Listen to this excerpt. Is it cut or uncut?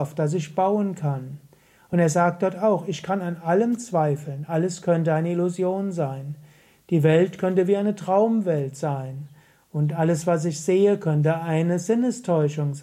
uncut